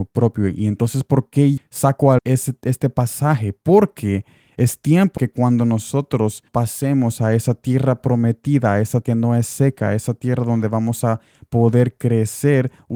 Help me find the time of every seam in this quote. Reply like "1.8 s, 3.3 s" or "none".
1.6 s, 2.2 s, 5.2 s, 6.5 s, 9.0 s